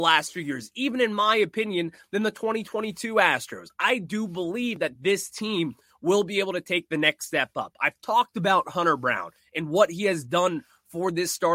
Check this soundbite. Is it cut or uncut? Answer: uncut